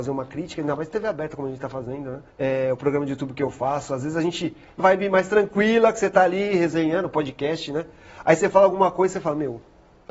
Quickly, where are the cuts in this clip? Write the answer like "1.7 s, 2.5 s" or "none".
2.3 s, 4.8 s